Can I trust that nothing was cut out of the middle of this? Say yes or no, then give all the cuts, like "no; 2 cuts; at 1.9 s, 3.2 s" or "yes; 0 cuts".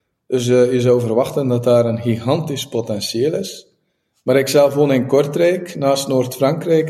yes; 0 cuts